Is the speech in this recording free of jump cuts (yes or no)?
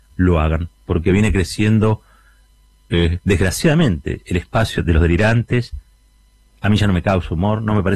no